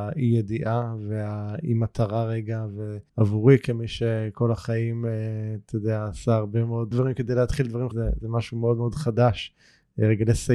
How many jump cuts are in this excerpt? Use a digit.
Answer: 3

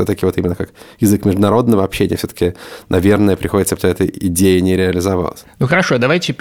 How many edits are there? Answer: 1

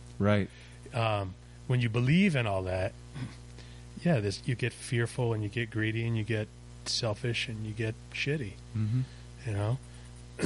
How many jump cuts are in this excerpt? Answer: 0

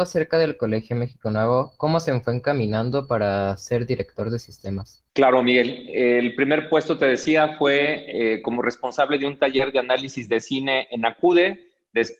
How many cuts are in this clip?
1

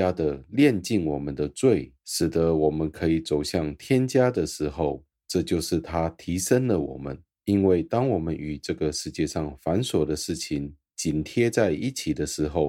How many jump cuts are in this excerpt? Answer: 2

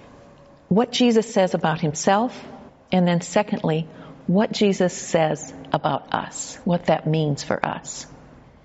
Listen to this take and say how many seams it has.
2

